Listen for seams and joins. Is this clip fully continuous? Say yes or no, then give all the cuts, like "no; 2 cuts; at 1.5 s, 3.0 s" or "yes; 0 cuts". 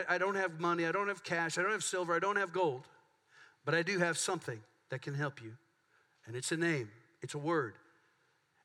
yes; 0 cuts